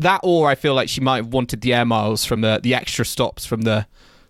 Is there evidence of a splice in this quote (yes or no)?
no